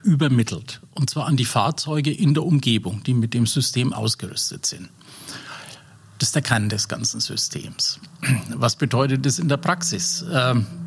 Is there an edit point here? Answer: no; 0 cuts

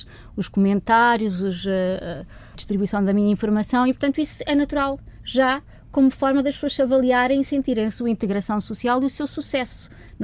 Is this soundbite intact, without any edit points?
no; 1 cut; at 2.5 s

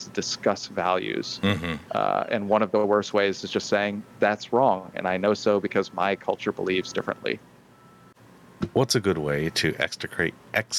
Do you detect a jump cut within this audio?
no; 0 cuts

